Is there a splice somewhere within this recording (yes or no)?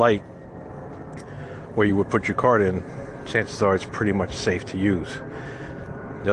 no